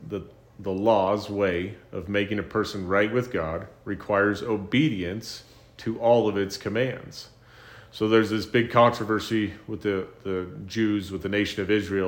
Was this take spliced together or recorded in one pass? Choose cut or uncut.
uncut